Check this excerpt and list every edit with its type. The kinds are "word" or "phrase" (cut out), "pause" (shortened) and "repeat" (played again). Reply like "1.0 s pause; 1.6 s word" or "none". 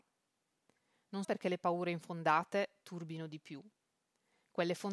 1.2 s word